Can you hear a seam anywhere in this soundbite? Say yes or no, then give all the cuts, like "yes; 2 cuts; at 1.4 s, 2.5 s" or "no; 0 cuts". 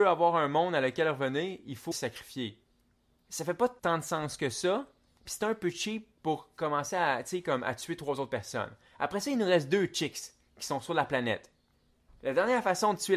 yes; 1 cut; at 1.9 s